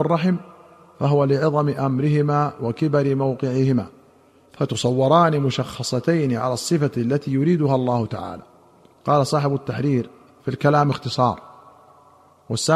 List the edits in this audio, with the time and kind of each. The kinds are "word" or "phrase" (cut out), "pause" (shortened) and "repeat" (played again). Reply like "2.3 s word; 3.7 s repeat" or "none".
none